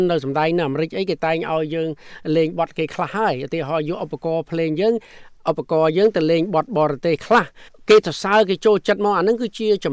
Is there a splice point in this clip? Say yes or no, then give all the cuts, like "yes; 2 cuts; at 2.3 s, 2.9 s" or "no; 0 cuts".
yes; 1 cut; at 7.7 s